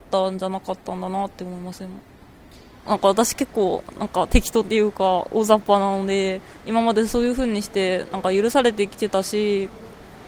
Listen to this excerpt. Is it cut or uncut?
uncut